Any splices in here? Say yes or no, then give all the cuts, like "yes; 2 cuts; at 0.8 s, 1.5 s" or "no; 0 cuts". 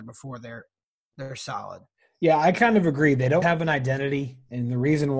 yes; 1 cut; at 3.4 s